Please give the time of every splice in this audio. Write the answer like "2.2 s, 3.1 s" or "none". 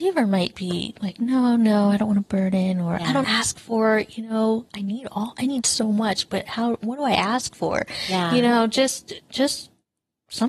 3.2 s